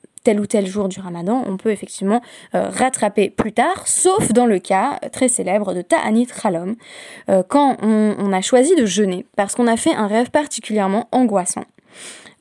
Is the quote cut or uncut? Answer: uncut